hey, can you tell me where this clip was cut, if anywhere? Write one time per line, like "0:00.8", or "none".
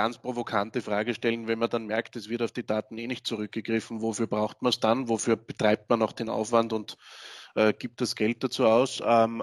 none

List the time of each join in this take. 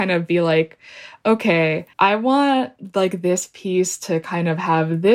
0:01.9

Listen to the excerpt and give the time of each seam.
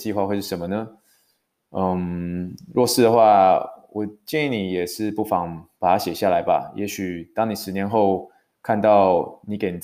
none

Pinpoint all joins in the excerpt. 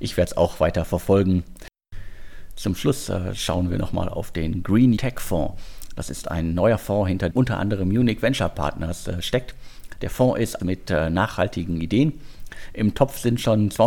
0:05.0
0:07.3
0:10.6

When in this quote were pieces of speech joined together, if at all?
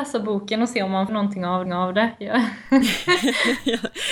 0:01.1
0:01.7

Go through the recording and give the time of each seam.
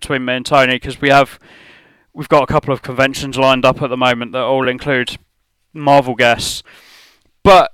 none

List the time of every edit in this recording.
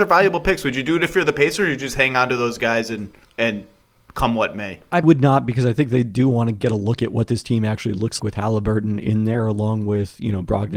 0:03.2
0:05.0
0:08.2

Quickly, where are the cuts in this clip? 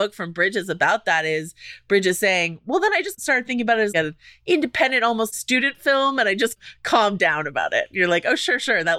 none

